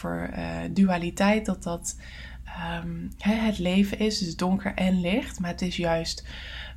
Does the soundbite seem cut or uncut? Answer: uncut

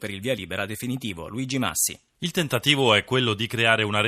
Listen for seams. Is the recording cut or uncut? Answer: uncut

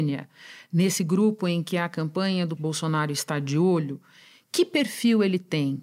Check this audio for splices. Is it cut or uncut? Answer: cut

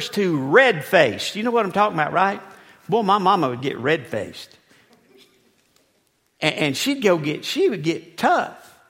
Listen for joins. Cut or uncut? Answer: uncut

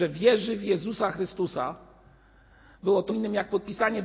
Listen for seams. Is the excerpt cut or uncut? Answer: cut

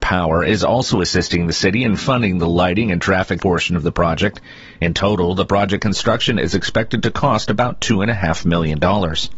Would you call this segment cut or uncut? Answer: cut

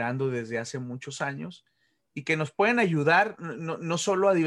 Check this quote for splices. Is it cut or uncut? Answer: uncut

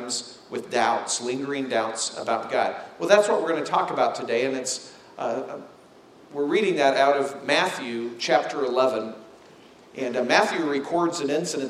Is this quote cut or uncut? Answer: uncut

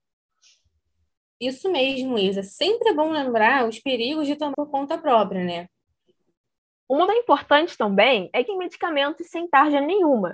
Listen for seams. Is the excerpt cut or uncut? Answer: cut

